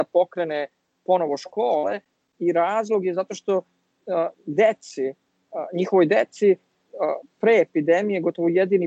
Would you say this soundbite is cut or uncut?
uncut